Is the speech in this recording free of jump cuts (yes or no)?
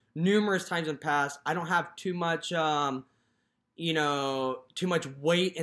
yes